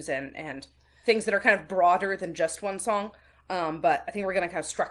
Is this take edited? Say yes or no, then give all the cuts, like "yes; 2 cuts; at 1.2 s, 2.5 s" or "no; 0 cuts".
no; 0 cuts